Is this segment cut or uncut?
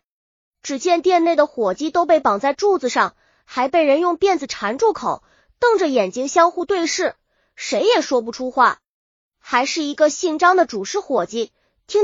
uncut